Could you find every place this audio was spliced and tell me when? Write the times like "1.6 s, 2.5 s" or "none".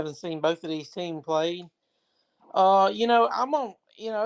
none